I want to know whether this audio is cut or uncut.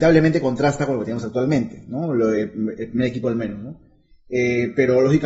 uncut